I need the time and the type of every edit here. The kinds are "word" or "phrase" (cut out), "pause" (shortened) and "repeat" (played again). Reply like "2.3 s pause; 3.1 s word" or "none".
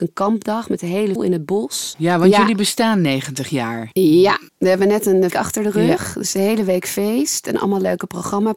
1.2 s word; 4.5 s pause; 5.3 s word